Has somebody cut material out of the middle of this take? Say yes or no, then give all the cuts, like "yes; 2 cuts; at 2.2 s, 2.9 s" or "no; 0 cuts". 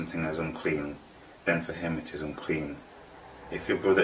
yes; 1 cut; at 1.4 s